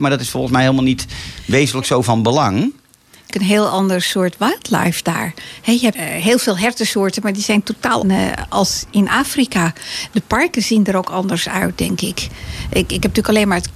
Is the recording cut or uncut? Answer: cut